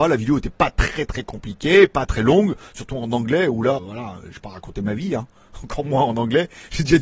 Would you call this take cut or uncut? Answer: cut